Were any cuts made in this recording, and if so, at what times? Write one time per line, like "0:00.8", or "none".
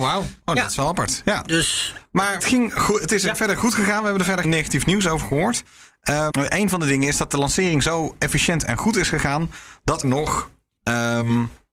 0:02.4
0:04.4
0:06.3
0:10.0